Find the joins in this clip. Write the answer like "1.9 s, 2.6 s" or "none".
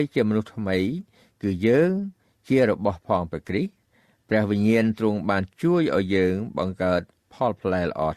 none